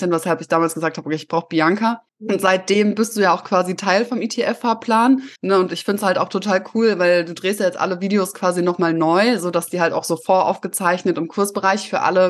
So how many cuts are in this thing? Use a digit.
2